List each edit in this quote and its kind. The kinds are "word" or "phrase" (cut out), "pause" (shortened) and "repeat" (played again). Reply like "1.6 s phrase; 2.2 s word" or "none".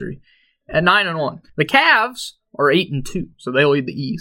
1.5 s pause